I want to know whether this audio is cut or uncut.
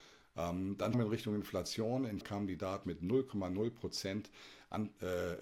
cut